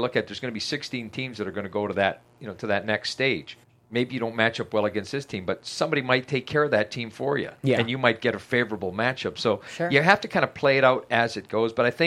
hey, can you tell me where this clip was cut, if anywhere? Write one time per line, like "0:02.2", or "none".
0:03.6
0:07.6

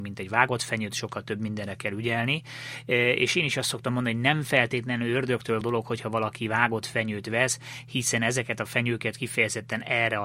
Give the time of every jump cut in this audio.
0:05.6

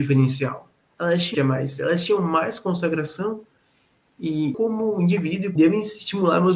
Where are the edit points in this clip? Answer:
0:01.3
0:04.5
0:05.6

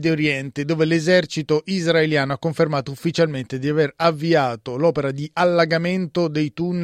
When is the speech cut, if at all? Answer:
none

